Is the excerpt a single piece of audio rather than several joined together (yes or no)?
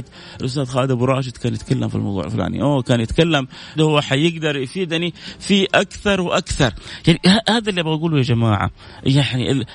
no